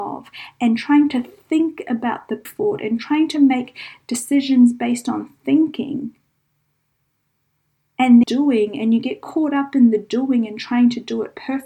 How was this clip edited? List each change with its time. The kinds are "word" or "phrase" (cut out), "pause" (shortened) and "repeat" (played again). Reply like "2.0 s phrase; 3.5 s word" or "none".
2.5 s phrase; 8.2 s word